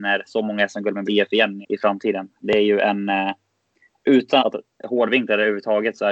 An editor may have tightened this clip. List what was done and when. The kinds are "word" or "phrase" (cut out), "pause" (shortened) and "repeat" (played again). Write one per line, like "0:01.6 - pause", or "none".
0:01.1 - word
0:01.6 - word
0:04.4 - word